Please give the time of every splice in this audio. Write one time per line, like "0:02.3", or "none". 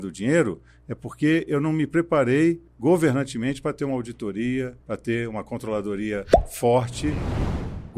0:02.7
0:04.8